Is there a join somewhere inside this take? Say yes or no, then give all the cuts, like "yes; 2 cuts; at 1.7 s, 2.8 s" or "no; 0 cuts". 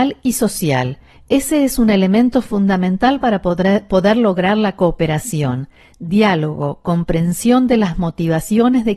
no; 0 cuts